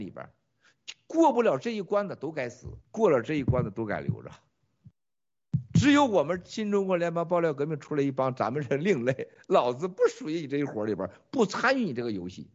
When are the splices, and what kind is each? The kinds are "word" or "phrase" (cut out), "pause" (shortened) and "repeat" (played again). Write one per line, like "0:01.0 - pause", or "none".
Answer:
0:02.8 - pause